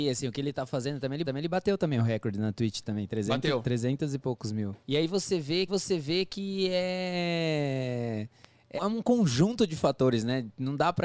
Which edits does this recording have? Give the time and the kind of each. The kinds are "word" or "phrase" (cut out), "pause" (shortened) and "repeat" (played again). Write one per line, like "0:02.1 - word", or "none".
0:01.2 - repeat
0:04.8 - pause
0:05.7 - repeat
0:08.8 - word